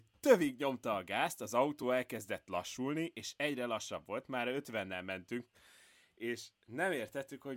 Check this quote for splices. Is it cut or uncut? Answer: uncut